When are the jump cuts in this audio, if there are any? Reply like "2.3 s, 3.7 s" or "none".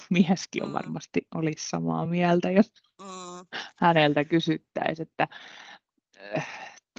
none